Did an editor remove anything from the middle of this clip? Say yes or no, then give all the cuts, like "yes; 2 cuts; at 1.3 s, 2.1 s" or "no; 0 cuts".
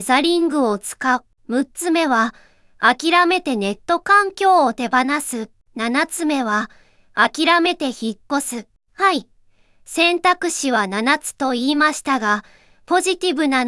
no; 0 cuts